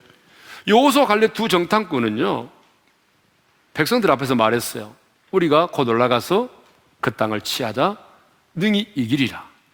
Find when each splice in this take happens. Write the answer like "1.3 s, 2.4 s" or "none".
none